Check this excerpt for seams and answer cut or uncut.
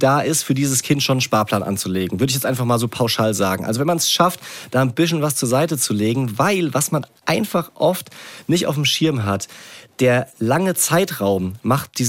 uncut